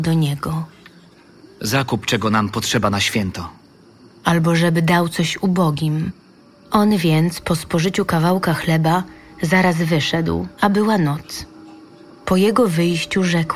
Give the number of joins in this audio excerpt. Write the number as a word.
one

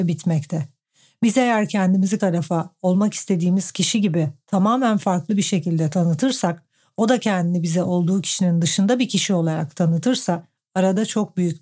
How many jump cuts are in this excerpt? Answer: one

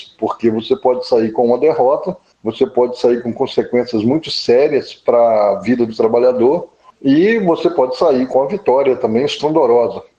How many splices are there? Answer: zero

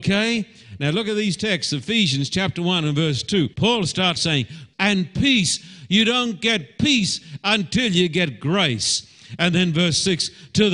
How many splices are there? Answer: three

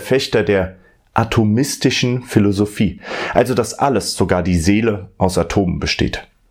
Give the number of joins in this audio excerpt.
zero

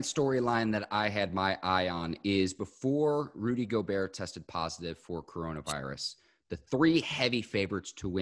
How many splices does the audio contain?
zero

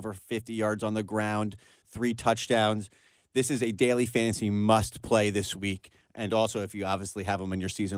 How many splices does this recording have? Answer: zero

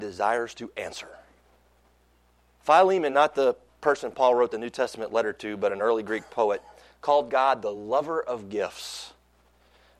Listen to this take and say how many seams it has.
zero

